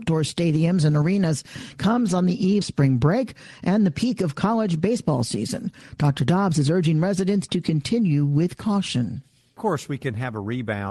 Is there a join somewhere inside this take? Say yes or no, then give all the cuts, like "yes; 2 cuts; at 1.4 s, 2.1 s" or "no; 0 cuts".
yes; 1 cut; at 2.6 s